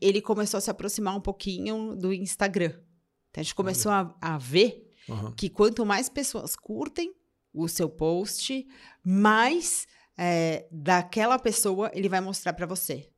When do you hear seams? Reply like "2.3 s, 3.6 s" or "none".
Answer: none